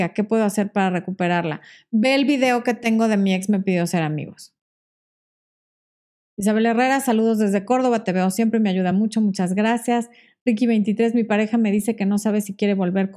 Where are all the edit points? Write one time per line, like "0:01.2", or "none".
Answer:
none